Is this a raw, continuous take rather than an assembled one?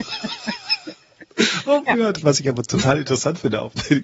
yes; 0 cuts

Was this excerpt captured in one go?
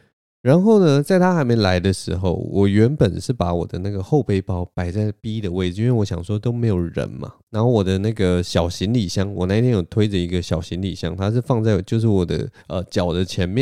no; 2 cuts; at 7.4 s, 12.6 s

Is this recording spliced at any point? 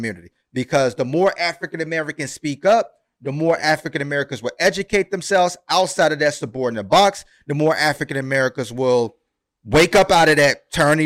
no; 0 cuts

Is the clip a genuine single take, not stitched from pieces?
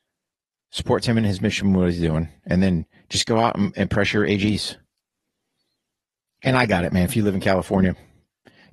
yes; 0 cuts

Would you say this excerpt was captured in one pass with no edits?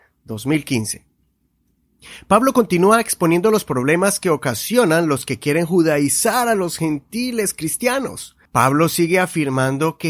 no; 1 cut; at 8.5 s

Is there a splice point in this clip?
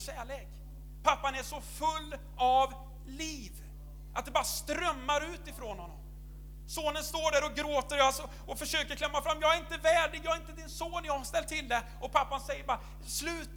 no; 0 cuts

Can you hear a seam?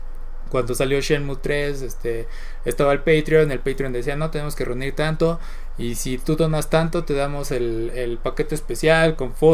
no; 0 cuts

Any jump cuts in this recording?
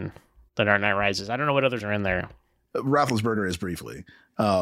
yes; 1 cut; at 1.8 s

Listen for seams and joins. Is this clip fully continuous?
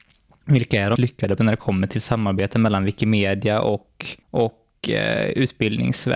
no; 3 cuts; at 1.0 s, 1.4 s, 4.2 s

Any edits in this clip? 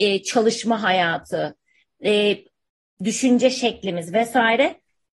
no; 0 cuts

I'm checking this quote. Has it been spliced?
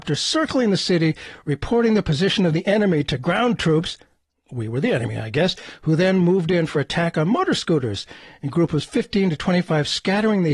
no; 0 cuts

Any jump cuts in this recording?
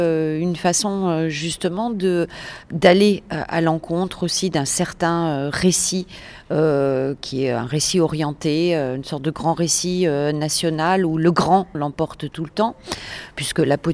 yes; 1 cut; at 11.7 s

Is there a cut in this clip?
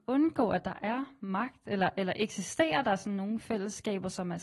no; 0 cuts

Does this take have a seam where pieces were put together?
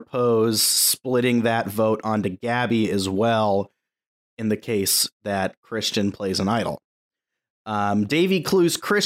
no; 0 cuts

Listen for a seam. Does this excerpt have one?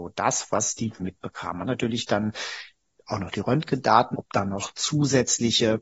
yes; 3 cuts; at 1.0 s, 1.6 s, 4.1 s

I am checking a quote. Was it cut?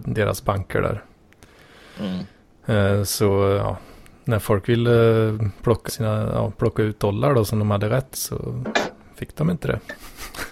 yes; 2 cuts; at 5.9 s, 8.1 s

